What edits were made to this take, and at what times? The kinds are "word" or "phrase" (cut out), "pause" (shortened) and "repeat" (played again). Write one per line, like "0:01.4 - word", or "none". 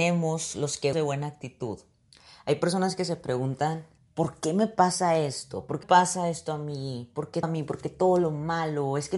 0:00.9 - word
0:04.0 - pause
0:05.8 - word
0:07.4 - word